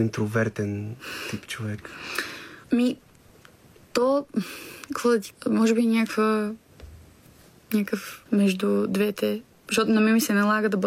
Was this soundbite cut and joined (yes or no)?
yes